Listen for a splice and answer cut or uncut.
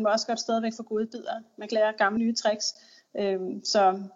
cut